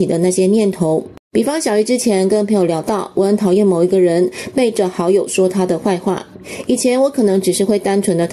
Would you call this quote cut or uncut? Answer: cut